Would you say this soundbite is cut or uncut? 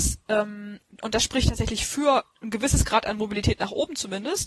cut